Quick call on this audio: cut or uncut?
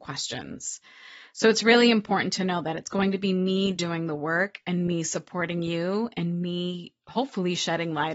uncut